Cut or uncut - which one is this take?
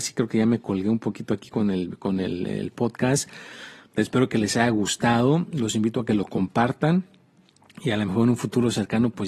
uncut